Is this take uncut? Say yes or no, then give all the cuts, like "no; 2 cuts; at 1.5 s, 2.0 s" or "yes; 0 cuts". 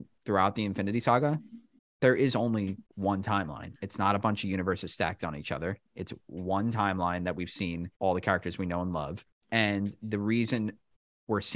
no; 6 cuts; at 1.8 s, 2.9 s, 3.8 s, 5.9 s, 7.9 s, 9.3 s